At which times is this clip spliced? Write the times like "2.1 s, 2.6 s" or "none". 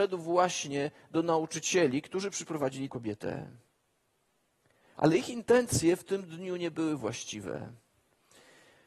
2.9 s